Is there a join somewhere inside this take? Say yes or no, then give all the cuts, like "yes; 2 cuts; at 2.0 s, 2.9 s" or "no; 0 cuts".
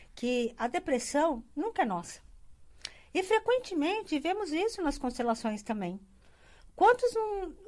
no; 0 cuts